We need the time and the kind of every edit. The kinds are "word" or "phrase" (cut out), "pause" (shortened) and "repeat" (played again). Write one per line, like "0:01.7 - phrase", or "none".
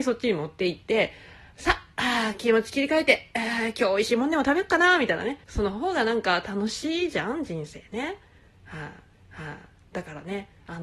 0:05.4 - pause
0:09.1 - repeat